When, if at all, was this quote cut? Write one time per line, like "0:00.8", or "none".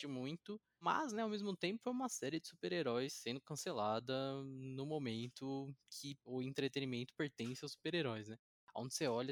none